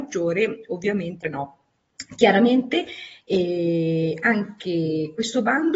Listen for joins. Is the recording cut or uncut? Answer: cut